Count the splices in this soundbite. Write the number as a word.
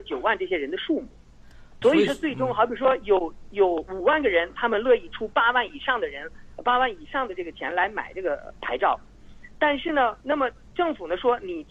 two